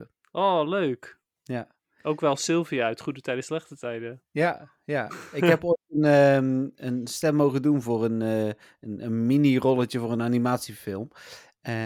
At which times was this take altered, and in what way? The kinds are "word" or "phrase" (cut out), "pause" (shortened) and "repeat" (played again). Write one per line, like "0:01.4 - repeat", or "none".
none